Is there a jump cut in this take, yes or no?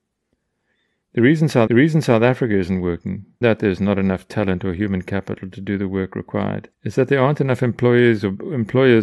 yes